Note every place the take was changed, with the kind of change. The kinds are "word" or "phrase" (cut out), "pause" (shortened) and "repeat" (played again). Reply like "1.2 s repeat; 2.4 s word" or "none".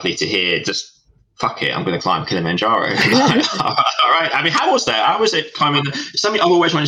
none